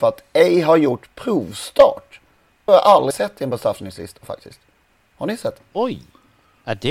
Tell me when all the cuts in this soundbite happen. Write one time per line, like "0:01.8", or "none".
0:02.7
0:03.1